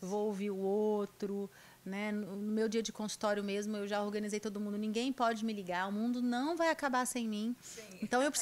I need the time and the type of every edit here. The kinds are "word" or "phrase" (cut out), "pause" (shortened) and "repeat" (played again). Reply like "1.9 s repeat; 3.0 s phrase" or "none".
none